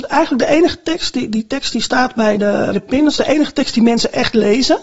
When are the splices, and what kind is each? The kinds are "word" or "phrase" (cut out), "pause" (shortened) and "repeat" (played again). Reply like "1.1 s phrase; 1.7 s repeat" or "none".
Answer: 1.3 s word; 2.7 s word